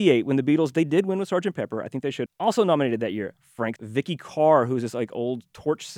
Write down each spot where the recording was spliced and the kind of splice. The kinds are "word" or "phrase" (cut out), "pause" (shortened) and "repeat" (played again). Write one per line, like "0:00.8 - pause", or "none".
0:02.3 - word
0:03.8 - word